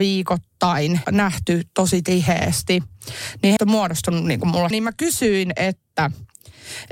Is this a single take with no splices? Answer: no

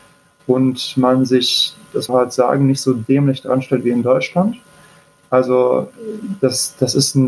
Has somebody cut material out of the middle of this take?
yes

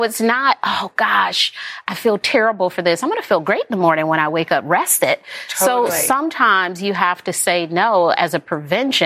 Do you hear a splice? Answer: no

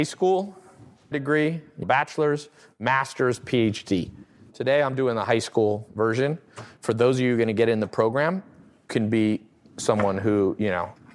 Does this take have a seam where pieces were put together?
yes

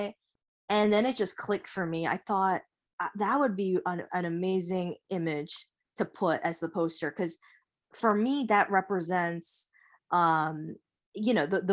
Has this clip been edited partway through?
no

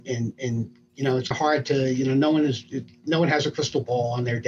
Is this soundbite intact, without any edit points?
no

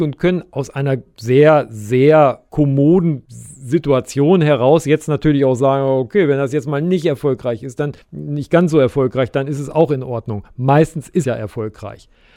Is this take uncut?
no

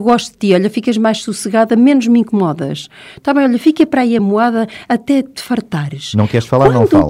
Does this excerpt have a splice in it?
no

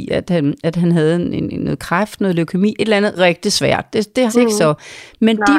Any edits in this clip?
yes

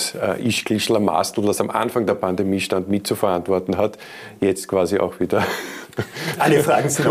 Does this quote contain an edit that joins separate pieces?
no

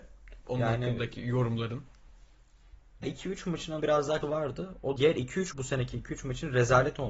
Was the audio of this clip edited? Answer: yes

